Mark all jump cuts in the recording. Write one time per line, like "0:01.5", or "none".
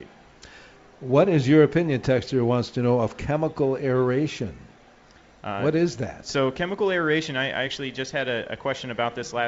none